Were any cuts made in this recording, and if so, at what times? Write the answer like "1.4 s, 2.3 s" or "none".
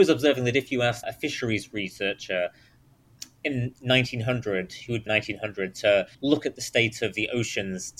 1.0 s, 5.1 s, 6.1 s